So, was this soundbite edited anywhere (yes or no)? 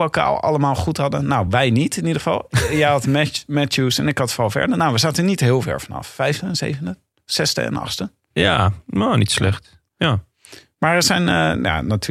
no